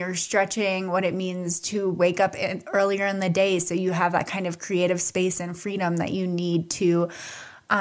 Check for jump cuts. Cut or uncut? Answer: uncut